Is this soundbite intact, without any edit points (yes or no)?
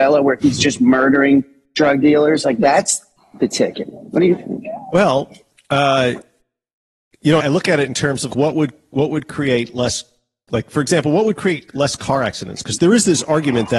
no